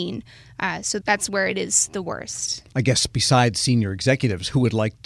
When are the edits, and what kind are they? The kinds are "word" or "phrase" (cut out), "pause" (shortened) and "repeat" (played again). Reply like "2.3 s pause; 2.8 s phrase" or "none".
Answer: 1.0 s word

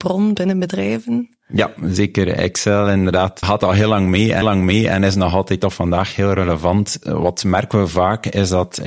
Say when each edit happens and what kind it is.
3.4 s word; 4.4 s repeat

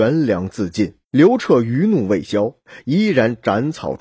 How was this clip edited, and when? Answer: 1.0 s pause

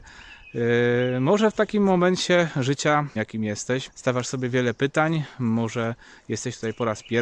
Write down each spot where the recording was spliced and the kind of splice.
3.2 s word; 3.9 s word

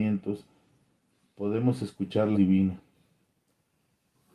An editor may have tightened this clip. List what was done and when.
2.3 s word

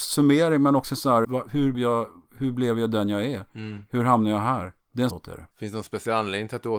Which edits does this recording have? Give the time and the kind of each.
1.2 s word; 1.7 s word; 4.8 s pause; 5.1 s word; 5.5 s pause

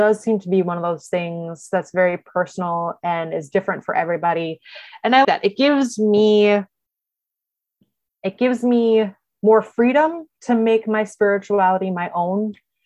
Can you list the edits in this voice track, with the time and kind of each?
5.2 s word

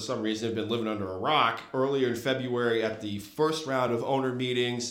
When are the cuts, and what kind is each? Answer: none

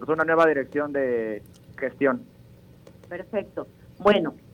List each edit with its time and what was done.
1.8 s word; 3.0 s pause

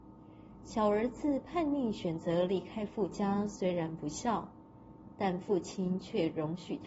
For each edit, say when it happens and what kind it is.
none

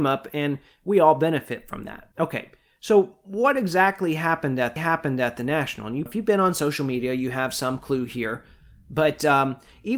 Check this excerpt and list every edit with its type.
2.1 s pause; 4.8 s repeat; 6.1 s phrase

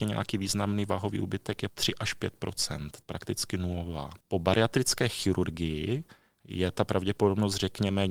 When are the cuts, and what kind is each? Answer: 1.7 s word; 3.0 s word; 4.2 s pause

